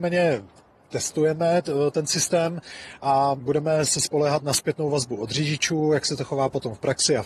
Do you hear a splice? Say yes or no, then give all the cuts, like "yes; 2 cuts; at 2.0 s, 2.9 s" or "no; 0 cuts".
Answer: no; 0 cuts